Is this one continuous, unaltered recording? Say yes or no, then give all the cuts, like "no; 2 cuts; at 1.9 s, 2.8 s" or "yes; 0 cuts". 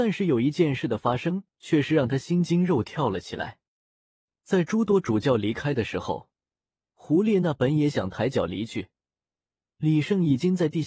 yes; 0 cuts